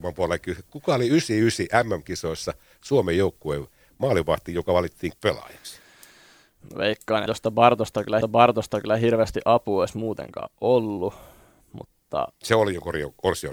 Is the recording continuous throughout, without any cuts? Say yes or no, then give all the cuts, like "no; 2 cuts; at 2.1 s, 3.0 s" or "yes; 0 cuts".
no; 3 cuts; at 5.1 s, 7.3 s, 8.2 s